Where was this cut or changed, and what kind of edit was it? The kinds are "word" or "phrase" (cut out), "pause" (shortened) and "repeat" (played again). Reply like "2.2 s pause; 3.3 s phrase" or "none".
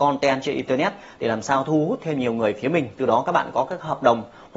none